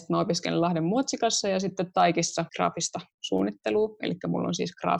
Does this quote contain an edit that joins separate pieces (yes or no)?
yes